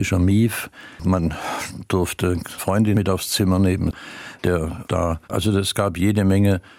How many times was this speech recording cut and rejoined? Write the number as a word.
four